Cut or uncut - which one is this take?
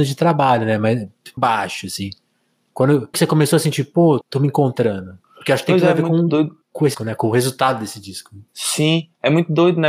cut